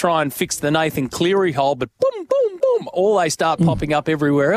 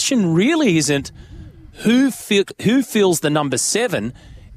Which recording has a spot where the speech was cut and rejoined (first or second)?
first